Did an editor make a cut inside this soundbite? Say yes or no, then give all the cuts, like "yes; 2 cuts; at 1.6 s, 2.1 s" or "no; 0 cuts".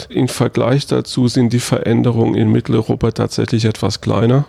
no; 0 cuts